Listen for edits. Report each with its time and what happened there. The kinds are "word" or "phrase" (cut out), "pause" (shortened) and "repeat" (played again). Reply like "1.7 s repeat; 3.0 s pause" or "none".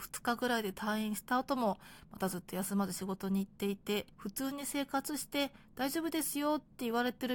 4.1 s pause